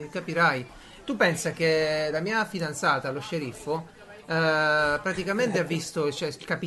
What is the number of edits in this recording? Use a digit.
0